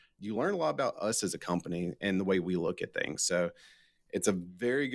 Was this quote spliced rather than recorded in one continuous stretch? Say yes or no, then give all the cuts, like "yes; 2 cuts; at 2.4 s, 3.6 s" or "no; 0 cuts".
no; 0 cuts